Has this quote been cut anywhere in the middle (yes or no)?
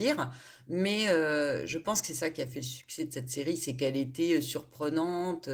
no